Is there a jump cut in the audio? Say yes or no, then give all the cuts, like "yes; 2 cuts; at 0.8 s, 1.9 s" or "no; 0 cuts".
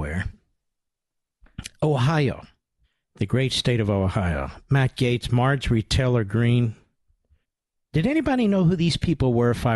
yes; 2 cuts; at 2.8 s, 7.4 s